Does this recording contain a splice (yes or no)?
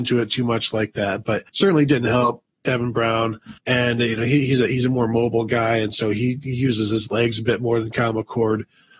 yes